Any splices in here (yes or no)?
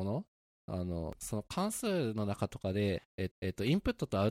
yes